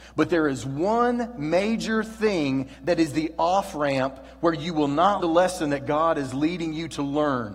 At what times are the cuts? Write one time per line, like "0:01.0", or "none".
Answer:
0:05.2